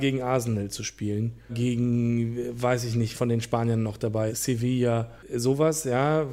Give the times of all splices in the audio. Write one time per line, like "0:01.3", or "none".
0:01.5
0:03.1
0:04.3